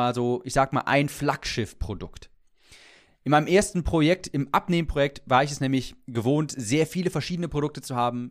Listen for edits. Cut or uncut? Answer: uncut